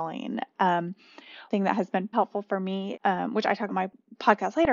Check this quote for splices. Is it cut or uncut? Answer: cut